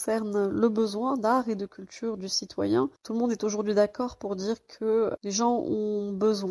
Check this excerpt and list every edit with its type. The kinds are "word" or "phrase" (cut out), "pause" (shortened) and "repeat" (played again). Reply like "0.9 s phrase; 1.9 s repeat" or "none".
3.0 s pause; 5.2 s word